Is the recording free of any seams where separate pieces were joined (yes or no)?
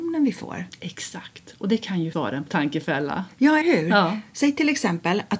no